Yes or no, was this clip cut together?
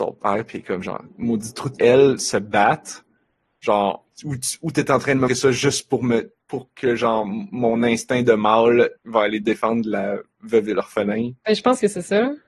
yes